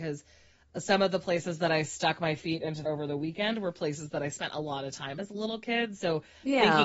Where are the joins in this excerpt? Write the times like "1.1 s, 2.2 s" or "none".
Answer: 2.9 s